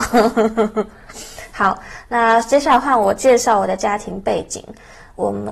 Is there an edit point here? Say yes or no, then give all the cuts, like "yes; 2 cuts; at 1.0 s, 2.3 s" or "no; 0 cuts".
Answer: no; 0 cuts